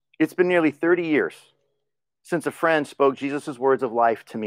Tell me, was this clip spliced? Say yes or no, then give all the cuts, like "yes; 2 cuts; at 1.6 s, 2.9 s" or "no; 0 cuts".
no; 0 cuts